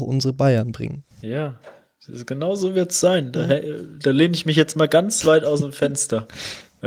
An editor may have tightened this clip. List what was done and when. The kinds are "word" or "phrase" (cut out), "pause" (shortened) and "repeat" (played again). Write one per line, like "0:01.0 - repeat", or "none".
0:01.1 - pause